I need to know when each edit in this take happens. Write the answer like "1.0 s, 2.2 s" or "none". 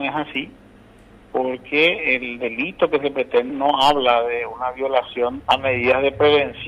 3.5 s, 5.4 s